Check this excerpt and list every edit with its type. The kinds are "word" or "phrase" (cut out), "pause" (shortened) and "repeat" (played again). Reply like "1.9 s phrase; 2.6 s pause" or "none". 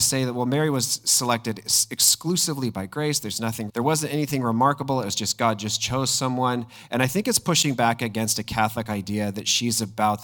3.7 s word